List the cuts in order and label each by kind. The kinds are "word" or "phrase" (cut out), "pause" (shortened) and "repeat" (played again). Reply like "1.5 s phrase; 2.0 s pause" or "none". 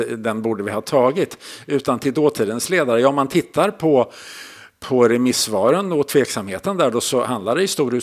none